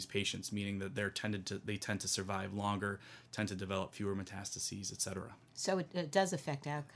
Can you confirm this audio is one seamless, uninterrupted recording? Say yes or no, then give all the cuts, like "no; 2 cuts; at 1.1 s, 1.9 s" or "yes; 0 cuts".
yes; 0 cuts